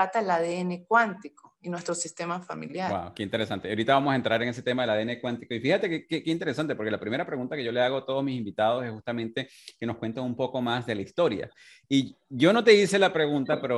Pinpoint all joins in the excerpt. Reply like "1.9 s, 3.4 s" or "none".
none